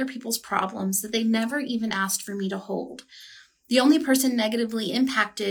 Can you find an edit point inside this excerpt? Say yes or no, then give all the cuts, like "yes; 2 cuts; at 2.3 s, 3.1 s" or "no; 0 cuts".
no; 0 cuts